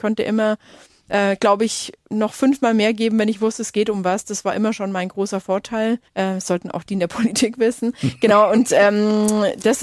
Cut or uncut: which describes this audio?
cut